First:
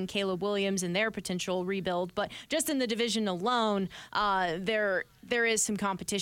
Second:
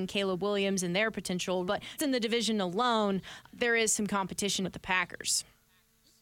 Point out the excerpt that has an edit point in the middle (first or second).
second